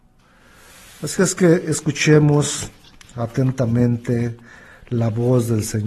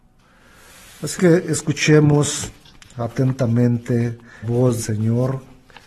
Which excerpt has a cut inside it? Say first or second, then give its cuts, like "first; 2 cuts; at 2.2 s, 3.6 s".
second; 3 cuts; at 1.2 s, 4.4 s, 4.8 s